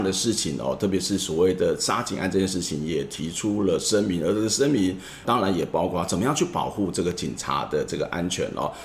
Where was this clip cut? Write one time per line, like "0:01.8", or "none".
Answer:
0:05.2